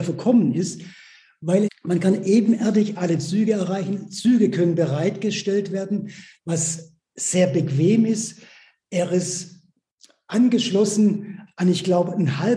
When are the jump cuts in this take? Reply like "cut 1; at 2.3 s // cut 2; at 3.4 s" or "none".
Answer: cut 1; at 1.7 s